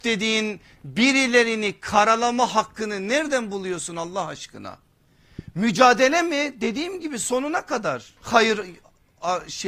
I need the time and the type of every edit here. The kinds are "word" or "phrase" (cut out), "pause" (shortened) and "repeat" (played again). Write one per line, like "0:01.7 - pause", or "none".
0:08.2 - pause